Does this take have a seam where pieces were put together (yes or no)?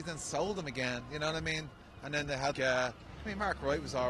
yes